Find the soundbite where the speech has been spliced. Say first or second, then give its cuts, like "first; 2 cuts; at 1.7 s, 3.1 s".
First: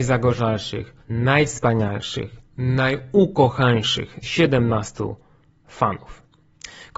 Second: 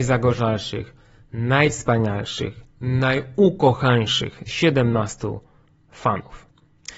first; 1 cut; at 1.0 s